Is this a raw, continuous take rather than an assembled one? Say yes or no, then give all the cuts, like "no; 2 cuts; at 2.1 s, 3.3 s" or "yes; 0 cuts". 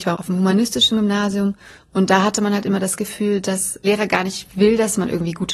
no; 1 cut; at 3.8 s